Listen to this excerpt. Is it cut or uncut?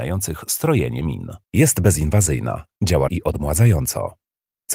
cut